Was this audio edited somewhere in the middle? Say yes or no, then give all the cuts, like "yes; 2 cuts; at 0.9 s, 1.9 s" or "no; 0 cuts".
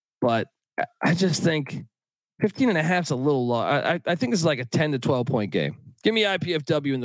no; 0 cuts